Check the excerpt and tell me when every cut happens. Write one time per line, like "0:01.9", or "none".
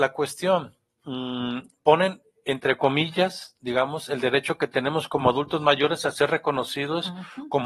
none

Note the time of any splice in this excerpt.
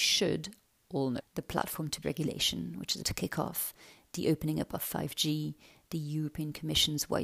0:01.2
0:02.0
0:03.0

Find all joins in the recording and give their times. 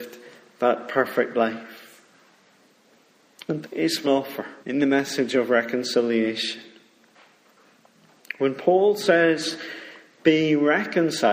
0:03.6
0:04.0
0:04.6

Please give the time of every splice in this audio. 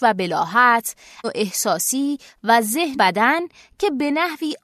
0:01.2
0:02.9

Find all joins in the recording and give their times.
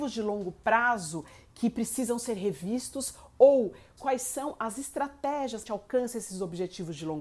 0:04.0
0:05.6

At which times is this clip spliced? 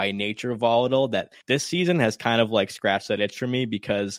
0:01.4

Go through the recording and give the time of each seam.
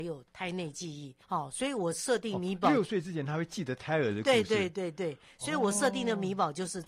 0:01.2

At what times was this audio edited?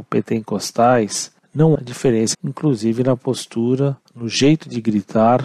0:01.7
0:02.3
0:04.0

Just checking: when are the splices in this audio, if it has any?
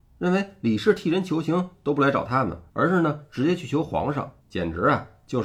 0:02.7
0:04.4

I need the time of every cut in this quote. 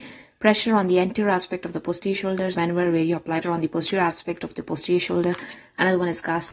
0:02.5
0:03.4

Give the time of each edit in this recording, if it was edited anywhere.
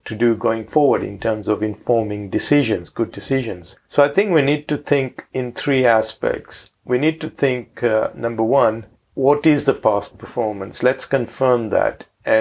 none

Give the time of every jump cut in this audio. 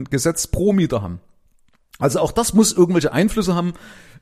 none

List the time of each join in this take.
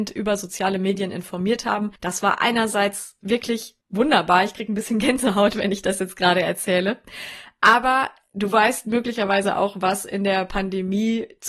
0:02.0
0:03.8

